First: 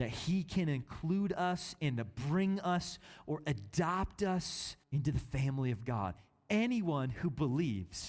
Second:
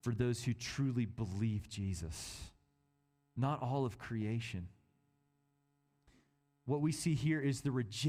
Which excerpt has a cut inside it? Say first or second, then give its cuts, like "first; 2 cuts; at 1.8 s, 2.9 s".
first; 1 cut; at 4.8 s